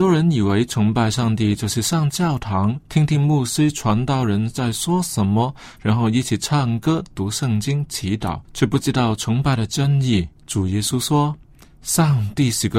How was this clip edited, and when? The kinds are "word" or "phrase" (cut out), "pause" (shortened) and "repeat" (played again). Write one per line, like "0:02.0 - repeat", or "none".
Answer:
0:02.8 - pause
0:08.4 - pause
0:10.4 - pause